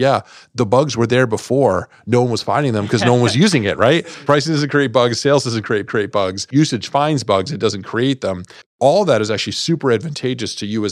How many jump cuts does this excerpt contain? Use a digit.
1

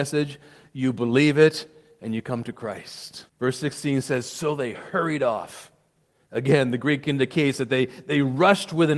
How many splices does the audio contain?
1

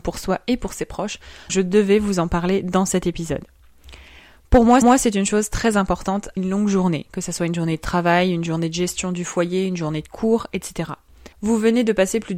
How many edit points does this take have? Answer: 4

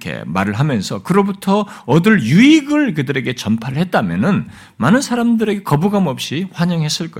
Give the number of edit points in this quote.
0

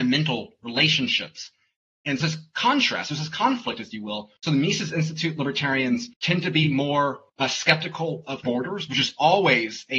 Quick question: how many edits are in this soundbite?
5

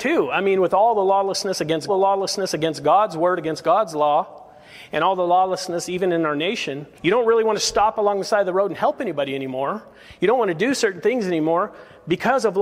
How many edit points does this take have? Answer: 2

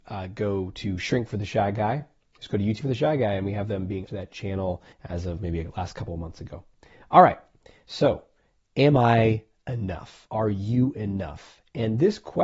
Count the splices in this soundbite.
4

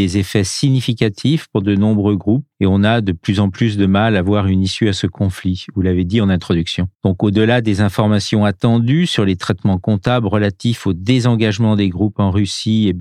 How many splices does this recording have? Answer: 2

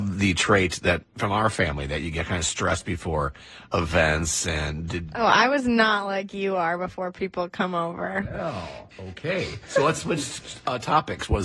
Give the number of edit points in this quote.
0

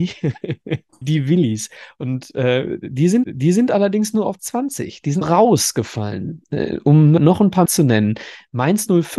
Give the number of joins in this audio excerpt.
6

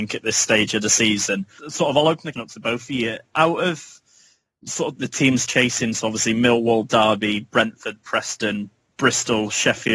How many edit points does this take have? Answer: 3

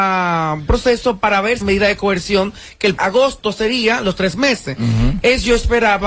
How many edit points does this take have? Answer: 2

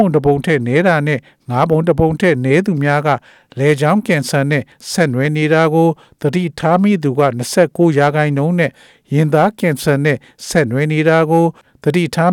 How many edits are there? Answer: 0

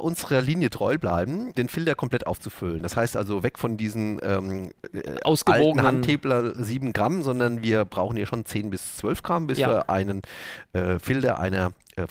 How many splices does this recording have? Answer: 1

